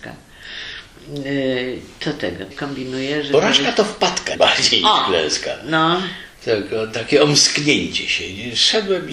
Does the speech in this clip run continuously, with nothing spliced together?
no; 3 cuts; at 2.5 s, 4.3 s, 6.3 s

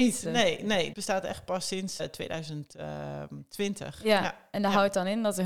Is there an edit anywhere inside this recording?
yes; 2 cuts; at 0.9 s, 2.0 s

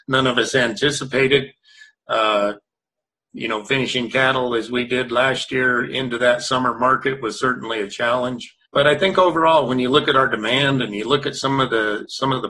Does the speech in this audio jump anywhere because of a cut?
yes; 1 cut; at 8.6 s

